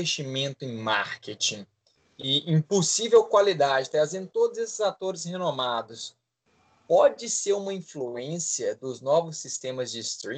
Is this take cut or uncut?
uncut